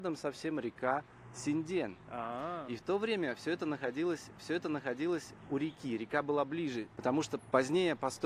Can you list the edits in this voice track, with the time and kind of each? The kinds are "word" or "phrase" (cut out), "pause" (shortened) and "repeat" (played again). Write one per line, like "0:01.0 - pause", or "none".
0:04.4 - repeat